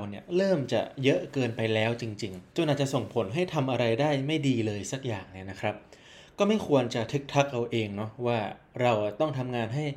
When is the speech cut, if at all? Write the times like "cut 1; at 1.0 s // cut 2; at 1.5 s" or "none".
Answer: cut 1; at 2.5 s